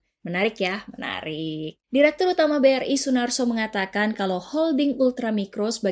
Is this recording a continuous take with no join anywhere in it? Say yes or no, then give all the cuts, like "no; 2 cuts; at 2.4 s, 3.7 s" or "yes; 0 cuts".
no; 1 cut; at 1.8 s